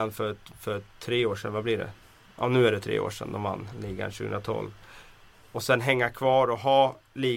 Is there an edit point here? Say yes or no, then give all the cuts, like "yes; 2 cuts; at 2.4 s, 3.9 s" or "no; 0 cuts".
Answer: no; 0 cuts